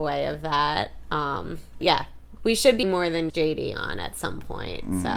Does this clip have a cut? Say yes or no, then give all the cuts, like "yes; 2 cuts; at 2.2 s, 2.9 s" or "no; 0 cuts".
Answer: yes; 4 cuts; at 1.8 s, 2.4 s, 2.8 s, 3.3 s